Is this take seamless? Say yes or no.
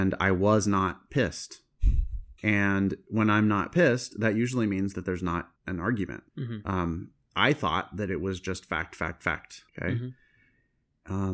no